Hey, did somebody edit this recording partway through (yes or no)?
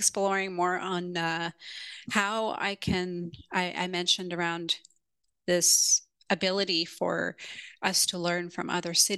no